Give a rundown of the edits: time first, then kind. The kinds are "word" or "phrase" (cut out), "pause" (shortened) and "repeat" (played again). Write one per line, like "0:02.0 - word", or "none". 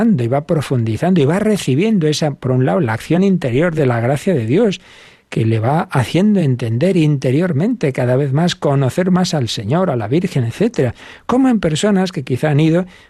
none